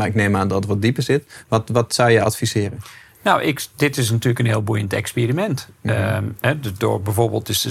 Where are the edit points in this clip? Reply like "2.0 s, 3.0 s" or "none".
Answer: none